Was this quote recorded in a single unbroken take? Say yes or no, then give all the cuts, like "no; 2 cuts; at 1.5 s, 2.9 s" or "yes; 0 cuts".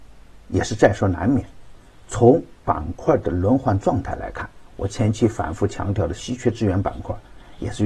yes; 0 cuts